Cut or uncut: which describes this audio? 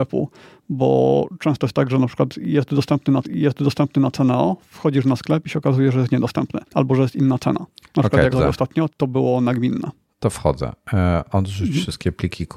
cut